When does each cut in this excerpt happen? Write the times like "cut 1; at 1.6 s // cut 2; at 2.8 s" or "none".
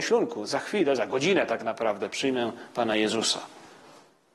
none